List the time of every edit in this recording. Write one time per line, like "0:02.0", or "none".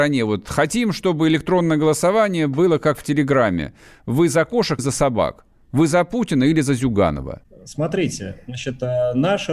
0:04.8